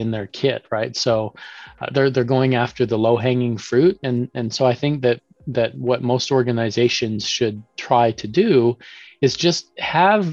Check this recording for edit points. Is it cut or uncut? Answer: uncut